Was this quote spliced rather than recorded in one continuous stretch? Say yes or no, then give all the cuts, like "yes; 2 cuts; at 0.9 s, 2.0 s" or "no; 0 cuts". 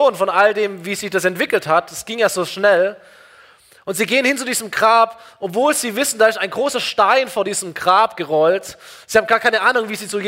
no; 0 cuts